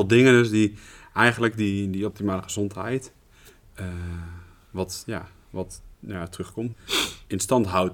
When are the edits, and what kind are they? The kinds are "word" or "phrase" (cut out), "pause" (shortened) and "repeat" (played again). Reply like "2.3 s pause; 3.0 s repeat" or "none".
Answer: 5.9 s pause; 6.7 s phrase